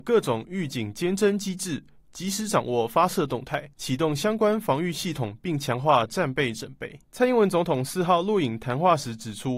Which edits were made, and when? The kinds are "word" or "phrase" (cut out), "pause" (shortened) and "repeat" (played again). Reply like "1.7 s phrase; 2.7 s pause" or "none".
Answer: 3.7 s pause; 7.0 s pause